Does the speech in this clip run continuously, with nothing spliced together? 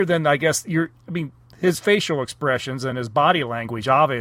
yes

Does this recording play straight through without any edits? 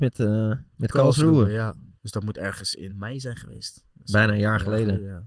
no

